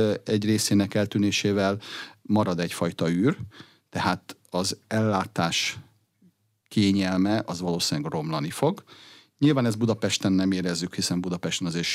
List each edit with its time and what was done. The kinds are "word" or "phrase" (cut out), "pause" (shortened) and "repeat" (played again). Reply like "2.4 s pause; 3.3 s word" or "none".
none